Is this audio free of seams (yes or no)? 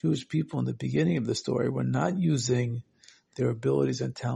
yes